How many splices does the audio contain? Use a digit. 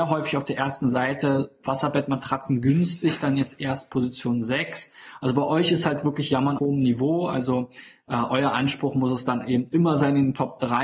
1